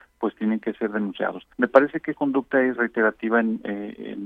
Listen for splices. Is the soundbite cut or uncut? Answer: cut